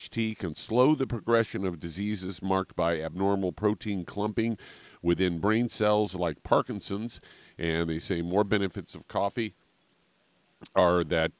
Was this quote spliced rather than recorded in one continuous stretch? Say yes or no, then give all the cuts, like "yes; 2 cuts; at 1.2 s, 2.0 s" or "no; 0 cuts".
no; 0 cuts